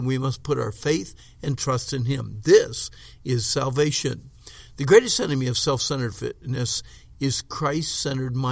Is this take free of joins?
yes; 0 cuts

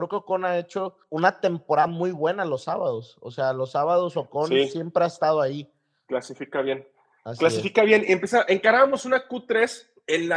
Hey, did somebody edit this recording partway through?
no; 0 cuts

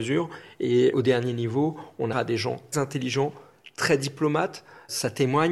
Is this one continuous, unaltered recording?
no; 3 cuts; at 0.9 s, 2.1 s, 2.7 s

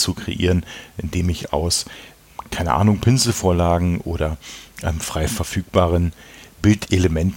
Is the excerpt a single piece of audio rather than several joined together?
yes; 0 cuts

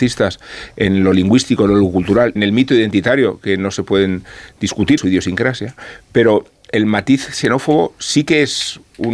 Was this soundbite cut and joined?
yes; 2 cuts; at 2.4 s, 5.0 s

